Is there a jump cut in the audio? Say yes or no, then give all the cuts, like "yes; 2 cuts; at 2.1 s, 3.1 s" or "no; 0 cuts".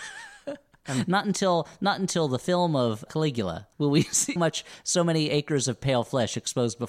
yes; 3 cuts; at 3.1 s, 3.7 s, 4.4 s